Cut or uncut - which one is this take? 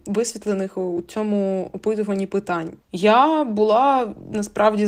uncut